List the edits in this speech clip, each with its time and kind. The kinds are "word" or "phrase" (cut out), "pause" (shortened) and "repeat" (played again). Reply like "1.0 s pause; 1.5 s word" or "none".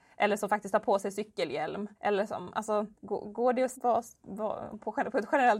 1.9 s pause; 2.9 s pause; 3.7 s word